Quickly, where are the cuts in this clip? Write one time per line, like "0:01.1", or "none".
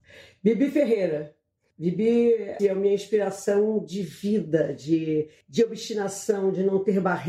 0:02.6
0:05.4